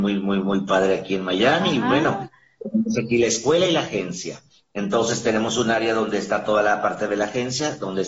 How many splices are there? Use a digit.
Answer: 0